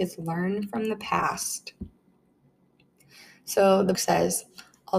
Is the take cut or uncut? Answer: cut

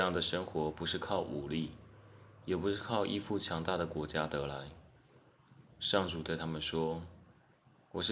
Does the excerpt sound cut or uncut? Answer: uncut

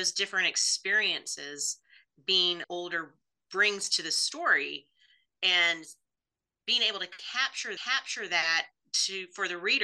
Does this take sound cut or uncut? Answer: cut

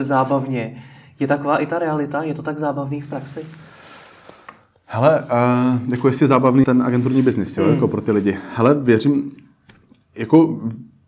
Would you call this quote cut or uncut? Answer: cut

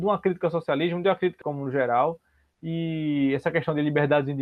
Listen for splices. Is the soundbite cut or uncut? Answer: cut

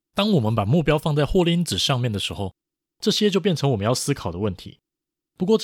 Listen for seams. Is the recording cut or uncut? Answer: uncut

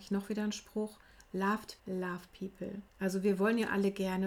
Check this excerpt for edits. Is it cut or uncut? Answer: cut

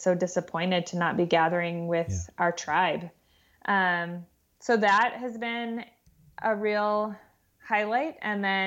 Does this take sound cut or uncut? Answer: uncut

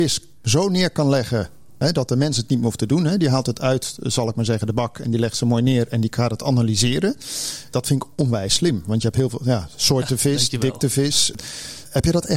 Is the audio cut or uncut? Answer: uncut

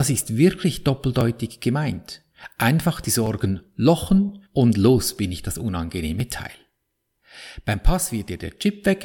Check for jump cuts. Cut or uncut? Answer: cut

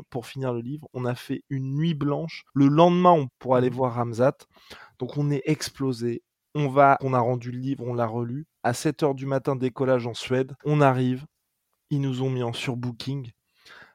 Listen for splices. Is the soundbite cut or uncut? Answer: cut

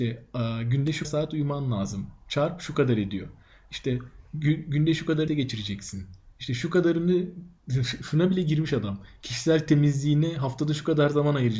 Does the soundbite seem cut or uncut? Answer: cut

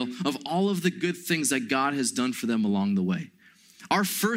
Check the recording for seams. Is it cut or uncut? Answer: uncut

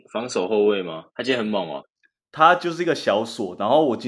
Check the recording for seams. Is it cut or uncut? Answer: cut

